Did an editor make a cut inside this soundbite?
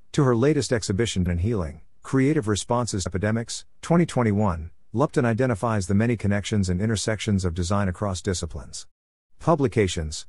yes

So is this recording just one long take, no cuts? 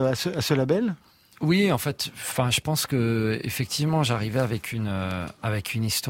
yes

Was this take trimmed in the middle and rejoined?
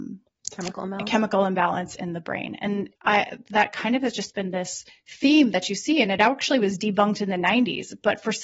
yes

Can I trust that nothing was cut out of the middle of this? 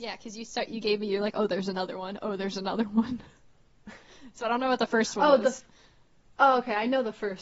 yes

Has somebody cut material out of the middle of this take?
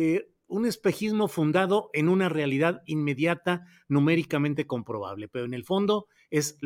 no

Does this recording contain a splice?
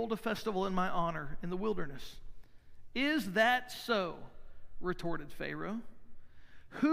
no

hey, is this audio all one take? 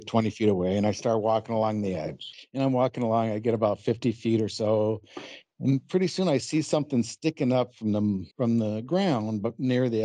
no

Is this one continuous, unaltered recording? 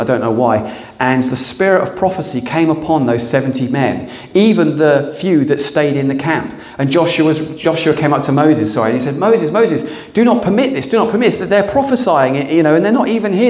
yes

